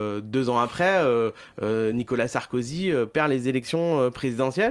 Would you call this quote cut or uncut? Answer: uncut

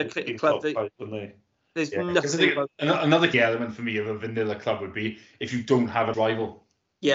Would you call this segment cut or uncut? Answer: cut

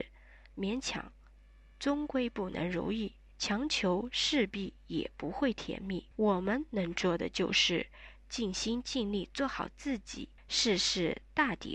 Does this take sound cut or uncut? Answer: cut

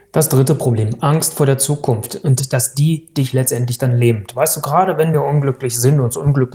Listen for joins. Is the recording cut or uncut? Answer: uncut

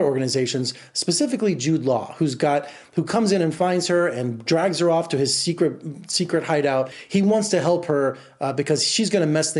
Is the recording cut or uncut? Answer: uncut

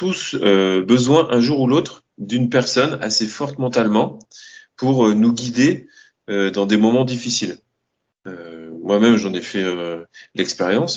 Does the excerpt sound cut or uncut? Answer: uncut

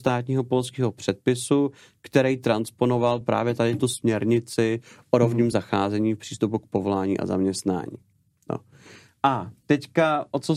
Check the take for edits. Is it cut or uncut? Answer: uncut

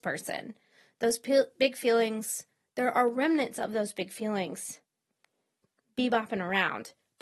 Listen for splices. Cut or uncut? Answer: uncut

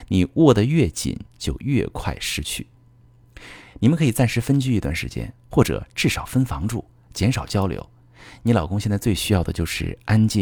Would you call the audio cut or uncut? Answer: uncut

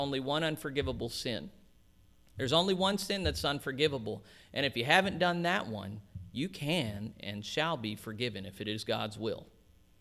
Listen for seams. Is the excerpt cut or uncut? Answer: uncut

